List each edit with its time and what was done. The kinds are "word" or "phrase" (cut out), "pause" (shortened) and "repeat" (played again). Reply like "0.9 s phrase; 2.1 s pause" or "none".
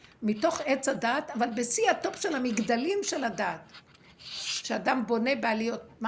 none